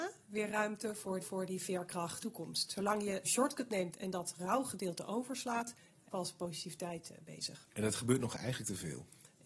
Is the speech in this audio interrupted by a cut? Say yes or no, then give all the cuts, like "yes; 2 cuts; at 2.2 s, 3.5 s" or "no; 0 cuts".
yes; 5 cuts; at 1.2 s, 2.2 s, 3.2 s, 6.1 s, 7.7 s